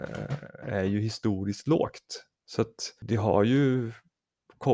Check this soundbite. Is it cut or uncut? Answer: cut